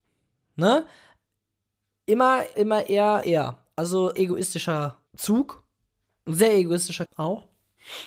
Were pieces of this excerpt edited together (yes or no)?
yes